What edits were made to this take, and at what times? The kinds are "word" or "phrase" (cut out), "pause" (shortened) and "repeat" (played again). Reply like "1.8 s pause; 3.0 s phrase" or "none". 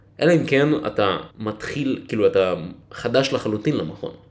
1.3 s pause